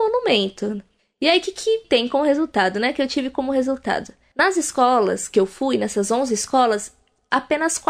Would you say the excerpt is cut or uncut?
uncut